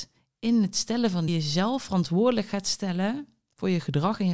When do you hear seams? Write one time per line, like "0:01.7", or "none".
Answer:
0:01.3